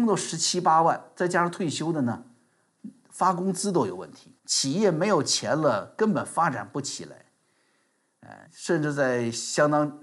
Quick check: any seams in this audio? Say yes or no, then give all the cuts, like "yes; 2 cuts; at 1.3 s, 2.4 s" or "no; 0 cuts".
yes; 2 cuts; at 4.4 s, 8.5 s